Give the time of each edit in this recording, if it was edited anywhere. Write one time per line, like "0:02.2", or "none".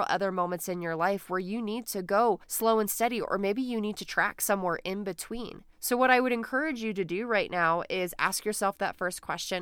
0:02.4
0:05.7